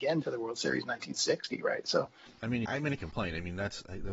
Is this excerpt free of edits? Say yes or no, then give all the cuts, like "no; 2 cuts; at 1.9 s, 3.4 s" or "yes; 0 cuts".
no; 2 cuts; at 2.6 s, 3.0 s